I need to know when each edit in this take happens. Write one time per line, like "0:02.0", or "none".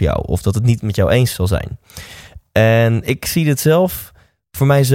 none

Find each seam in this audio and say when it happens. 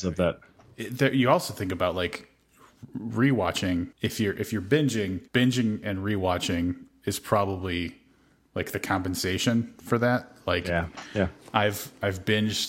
0:03.9
0:05.3

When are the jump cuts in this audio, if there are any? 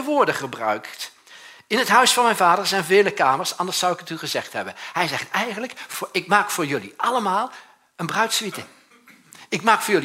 none

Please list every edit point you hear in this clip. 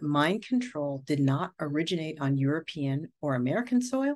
none

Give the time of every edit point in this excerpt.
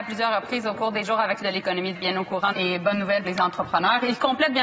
0:01.0
0:01.4
0:01.9
0:02.5
0:03.2

